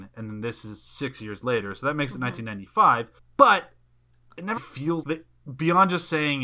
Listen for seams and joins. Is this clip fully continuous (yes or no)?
no